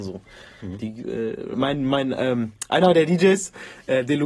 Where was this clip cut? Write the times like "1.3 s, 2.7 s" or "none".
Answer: 1.5 s